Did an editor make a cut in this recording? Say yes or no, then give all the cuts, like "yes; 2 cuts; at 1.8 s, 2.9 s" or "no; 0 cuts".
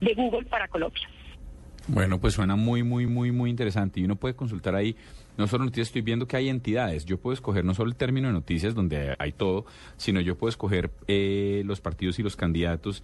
yes; 2 cuts; at 3.1 s, 9.1 s